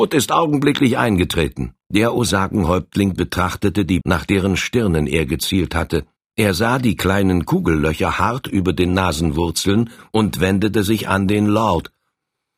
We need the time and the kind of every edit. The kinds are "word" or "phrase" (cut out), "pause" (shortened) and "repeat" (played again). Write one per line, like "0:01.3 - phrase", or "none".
0:01.8 - pause
0:04.0 - phrase
0:06.2 - pause